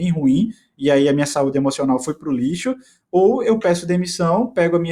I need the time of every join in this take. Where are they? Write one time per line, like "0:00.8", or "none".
none